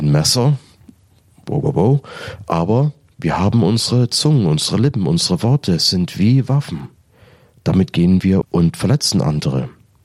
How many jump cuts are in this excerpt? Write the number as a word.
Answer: one